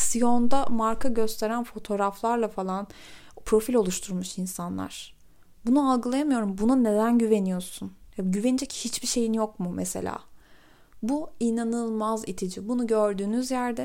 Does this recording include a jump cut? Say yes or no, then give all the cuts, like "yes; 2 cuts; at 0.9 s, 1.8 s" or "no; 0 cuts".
no; 0 cuts